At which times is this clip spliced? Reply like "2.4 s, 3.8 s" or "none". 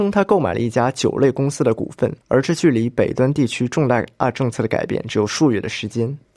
2.2 s